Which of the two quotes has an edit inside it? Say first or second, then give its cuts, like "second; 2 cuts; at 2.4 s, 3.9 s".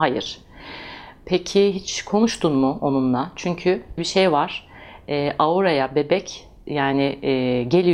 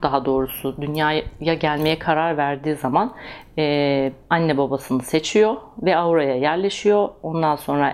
first; 1 cut; at 4.0 s